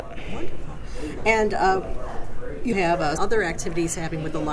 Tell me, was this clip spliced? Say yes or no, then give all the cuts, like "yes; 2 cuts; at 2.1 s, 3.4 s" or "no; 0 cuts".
yes; 2 cuts; at 2.7 s, 3.2 s